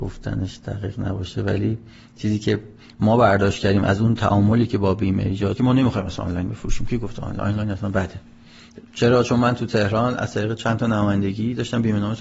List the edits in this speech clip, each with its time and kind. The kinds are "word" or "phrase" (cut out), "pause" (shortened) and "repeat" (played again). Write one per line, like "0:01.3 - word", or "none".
0:05.6 - phrase